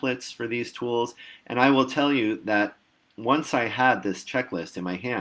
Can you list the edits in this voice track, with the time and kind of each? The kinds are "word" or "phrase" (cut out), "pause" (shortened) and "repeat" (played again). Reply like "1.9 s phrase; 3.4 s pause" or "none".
none